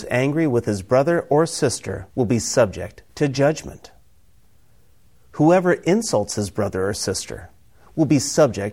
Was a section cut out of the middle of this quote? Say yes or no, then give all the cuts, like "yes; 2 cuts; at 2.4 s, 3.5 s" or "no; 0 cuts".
yes; 1 cut; at 2.1 s